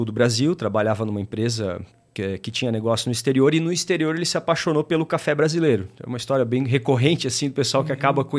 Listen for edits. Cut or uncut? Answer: uncut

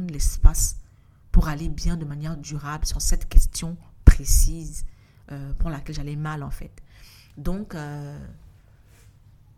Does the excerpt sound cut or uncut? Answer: uncut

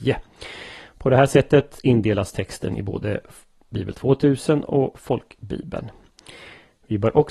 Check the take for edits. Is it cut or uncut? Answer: uncut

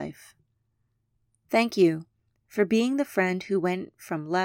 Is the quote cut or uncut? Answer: uncut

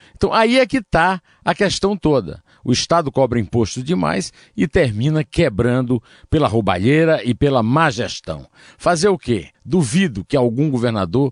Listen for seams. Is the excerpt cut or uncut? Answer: cut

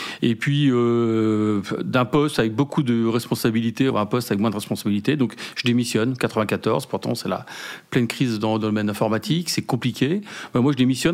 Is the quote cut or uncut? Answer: cut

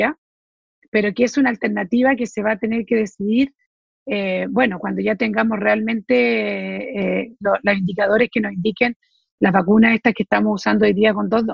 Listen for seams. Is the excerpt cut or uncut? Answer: uncut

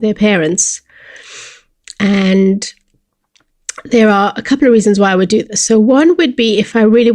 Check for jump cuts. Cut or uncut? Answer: uncut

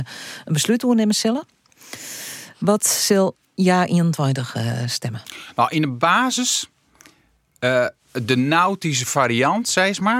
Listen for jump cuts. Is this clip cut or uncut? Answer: cut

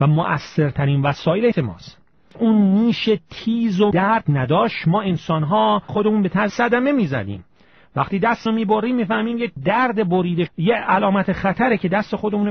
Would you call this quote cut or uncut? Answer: cut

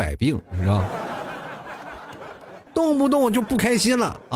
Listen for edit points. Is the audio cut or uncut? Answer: cut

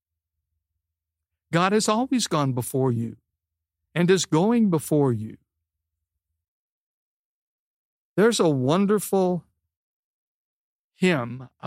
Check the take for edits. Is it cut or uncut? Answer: uncut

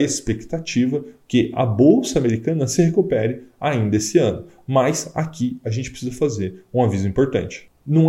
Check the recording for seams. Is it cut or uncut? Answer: uncut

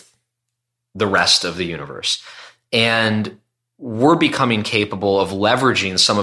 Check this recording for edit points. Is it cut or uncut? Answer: uncut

